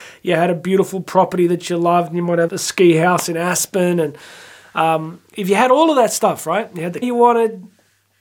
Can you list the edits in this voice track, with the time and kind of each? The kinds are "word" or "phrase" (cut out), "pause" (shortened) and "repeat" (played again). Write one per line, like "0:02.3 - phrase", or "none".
0:02.5 - word
0:07.0 - word